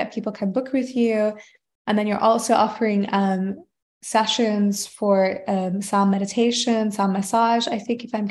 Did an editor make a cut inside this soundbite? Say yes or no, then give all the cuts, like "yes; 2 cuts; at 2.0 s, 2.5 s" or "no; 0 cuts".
no; 0 cuts